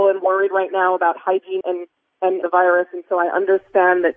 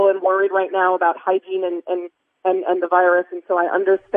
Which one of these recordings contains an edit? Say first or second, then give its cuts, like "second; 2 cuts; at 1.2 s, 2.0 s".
first; 2 cuts; at 1.6 s, 2.4 s